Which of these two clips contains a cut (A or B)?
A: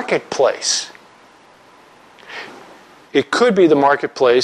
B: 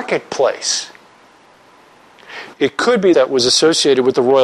B